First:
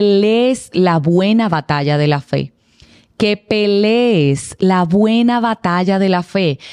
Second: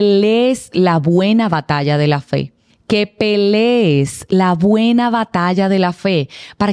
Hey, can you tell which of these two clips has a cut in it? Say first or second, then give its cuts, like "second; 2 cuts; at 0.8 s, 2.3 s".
second; 1 cut; at 2.7 s